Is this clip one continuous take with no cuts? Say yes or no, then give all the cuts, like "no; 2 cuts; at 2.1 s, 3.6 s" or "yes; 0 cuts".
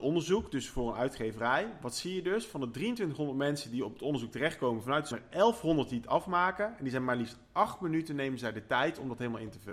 no; 1 cut; at 5.1 s